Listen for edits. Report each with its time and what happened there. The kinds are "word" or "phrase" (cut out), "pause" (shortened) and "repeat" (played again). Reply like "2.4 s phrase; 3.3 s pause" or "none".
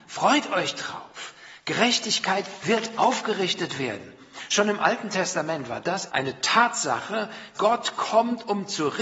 6.1 s word; 7.5 s word